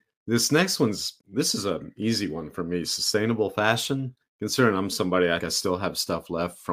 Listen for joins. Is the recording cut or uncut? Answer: cut